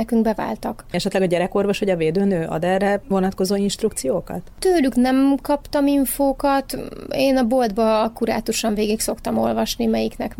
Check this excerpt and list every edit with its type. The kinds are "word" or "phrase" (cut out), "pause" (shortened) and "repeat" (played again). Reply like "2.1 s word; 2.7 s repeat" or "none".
none